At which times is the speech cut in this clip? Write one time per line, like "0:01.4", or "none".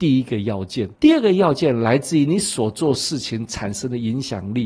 0:01.0